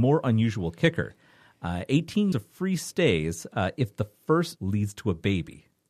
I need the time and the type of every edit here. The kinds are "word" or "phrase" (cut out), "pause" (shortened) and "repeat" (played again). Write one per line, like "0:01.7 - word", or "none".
0:02.3 - word
0:04.6 - word